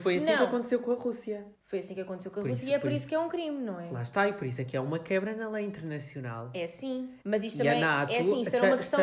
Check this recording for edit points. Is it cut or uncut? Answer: cut